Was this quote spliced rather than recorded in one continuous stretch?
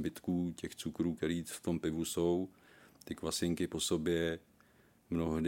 no; 0 cuts

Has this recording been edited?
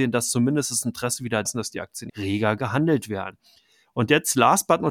yes; 2 cuts; at 1.4 s, 2.1 s

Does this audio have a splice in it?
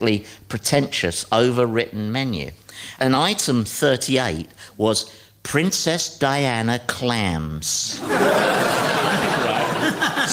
no; 0 cuts

